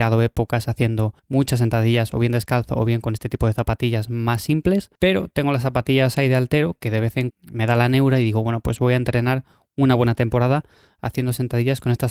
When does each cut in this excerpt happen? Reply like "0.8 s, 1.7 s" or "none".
1.2 s, 5.0 s, 7.3 s